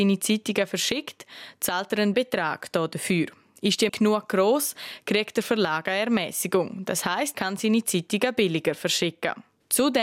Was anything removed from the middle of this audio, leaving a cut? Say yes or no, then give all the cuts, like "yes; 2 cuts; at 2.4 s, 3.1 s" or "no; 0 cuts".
yes; 3 cuts; at 2.1 s, 3.9 s, 7.3 s